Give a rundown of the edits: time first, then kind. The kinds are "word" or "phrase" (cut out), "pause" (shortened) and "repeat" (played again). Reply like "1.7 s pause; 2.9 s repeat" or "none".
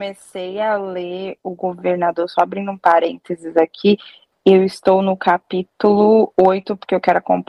none